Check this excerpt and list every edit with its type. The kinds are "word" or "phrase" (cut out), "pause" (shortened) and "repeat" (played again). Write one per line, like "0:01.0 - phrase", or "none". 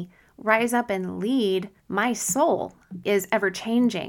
0:01.8 - pause
0:03.0 - word